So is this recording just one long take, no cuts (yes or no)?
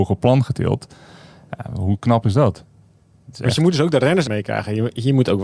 no